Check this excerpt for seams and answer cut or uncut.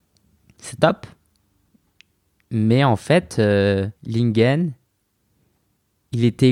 cut